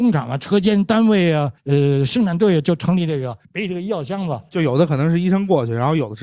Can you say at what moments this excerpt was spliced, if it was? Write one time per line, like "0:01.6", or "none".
0:01.6
0:03.4